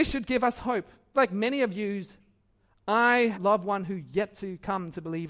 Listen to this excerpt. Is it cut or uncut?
cut